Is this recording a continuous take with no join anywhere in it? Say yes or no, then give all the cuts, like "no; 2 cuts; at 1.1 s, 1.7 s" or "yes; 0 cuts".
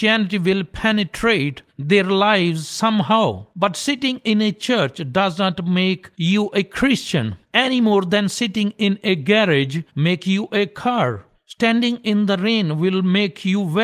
no; 6 cuts; at 1.7 s, 3.5 s, 6.1 s, 7.4 s, 9.9 s, 11.3 s